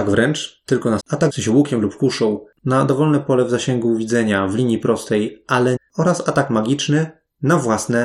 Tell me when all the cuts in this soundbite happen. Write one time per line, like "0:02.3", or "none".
0:01.0
0:01.3
0:05.8

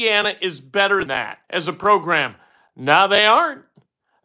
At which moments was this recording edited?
0:01.1
0:01.4

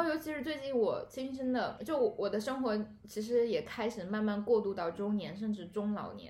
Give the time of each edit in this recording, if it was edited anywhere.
0:01.8

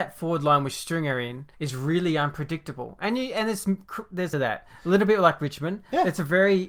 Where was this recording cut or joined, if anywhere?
0:01.5
0:04.3

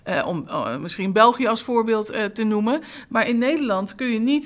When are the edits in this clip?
none

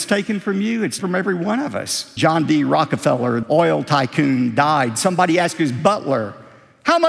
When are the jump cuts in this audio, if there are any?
0:01.0
0:02.2
0:03.4

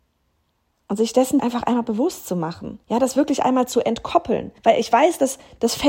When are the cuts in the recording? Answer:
0:01.4
0:02.8
0:04.6

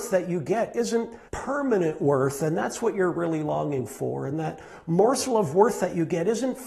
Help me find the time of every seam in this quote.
0:01.3

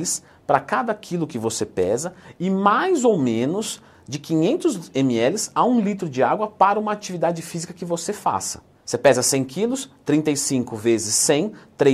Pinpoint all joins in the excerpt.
0:08.7

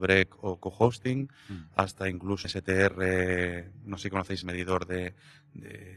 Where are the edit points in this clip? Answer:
0:02.4
0:04.4

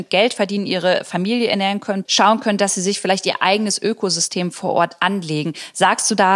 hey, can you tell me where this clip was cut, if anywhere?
0:02.0

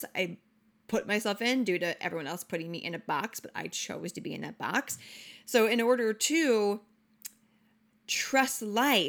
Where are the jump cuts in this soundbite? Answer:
none

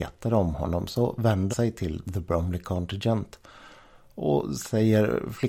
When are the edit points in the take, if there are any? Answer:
0:01.5

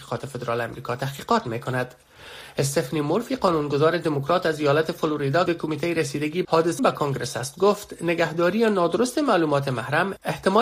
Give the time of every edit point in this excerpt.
0:05.5
0:06.4
0:06.8

